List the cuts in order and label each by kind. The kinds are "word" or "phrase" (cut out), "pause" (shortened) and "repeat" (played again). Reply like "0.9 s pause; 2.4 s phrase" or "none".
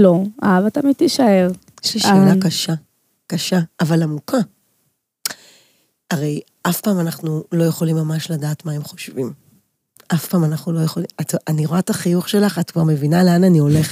none

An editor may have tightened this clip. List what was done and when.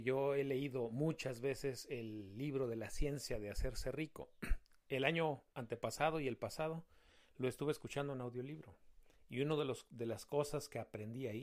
none

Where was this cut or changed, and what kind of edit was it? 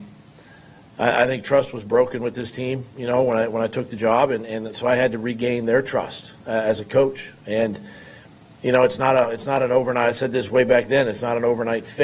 none

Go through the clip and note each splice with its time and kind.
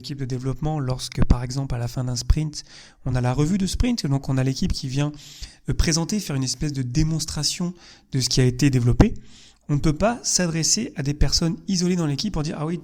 none

